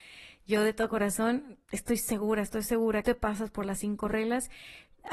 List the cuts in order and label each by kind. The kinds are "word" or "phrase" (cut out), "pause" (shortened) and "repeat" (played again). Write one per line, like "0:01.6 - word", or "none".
0:01.6 - pause
0:03.0 - phrase